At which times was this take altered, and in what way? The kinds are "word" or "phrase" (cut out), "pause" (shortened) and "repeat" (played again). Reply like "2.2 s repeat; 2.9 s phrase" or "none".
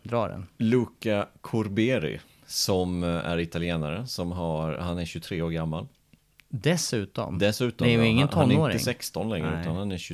none